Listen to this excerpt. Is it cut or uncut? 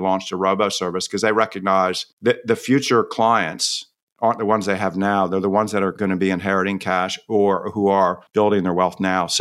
cut